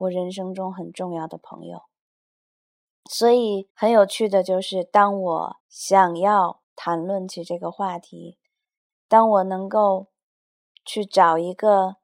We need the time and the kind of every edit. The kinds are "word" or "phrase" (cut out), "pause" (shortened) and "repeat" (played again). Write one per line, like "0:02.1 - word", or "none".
0:03.7 - pause
0:05.6 - pause
0:06.6 - pause